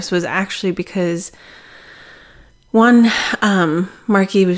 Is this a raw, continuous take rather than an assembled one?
yes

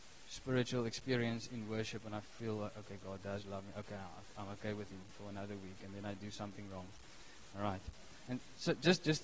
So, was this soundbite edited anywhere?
no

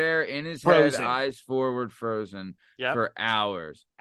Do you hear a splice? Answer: no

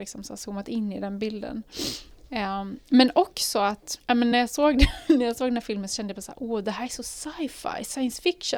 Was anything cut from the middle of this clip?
no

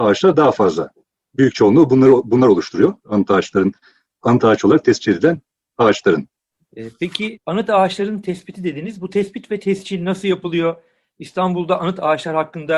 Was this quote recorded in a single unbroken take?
yes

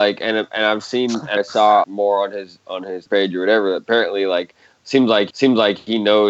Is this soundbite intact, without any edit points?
no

